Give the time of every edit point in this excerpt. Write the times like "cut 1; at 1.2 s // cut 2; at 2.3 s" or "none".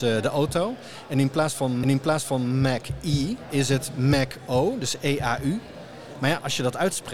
cut 1; at 1.8 s